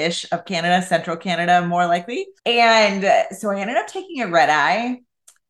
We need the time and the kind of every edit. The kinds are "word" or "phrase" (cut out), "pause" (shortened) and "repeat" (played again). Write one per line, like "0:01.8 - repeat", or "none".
0:02.4 - pause